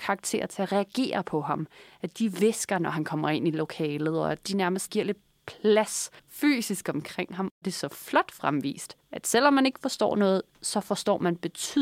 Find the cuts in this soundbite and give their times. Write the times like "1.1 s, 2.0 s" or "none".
6.2 s